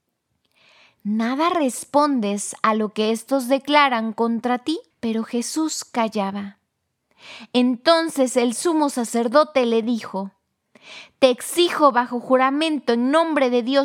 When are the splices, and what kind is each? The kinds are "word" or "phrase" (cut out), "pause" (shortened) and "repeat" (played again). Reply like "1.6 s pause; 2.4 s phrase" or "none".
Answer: 4.9 s pause